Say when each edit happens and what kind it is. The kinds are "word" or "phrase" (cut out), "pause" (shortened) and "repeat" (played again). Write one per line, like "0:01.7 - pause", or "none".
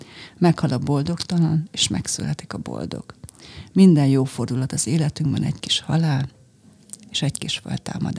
none